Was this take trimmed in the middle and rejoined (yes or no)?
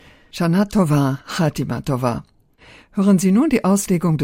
no